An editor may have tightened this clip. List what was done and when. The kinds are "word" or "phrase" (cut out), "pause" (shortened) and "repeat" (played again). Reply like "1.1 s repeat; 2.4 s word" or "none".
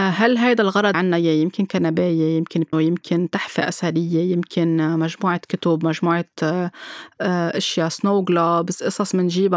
0.9 s word; 2.7 s word